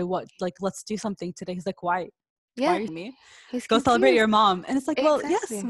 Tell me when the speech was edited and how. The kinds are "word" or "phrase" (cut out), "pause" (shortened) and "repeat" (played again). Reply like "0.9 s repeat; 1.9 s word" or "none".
2.9 s word